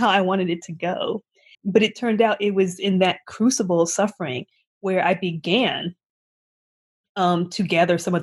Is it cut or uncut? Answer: cut